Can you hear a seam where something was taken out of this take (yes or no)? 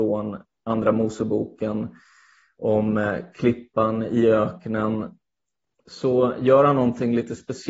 no